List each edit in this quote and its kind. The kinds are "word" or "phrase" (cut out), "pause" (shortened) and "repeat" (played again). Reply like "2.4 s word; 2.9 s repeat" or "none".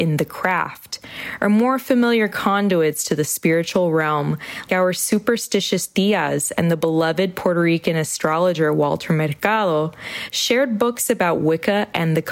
4.7 s word